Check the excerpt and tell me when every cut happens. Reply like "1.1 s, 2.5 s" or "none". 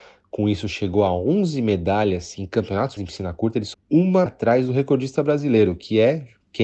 3.0 s, 3.7 s, 4.3 s